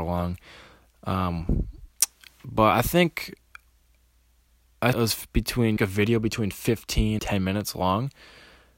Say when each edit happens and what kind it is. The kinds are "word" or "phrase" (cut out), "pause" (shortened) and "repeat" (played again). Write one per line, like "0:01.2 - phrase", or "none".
0:04.9 - phrase
0:05.8 - phrase
0:07.2 - word